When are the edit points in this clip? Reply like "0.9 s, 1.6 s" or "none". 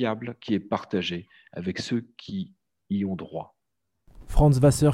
none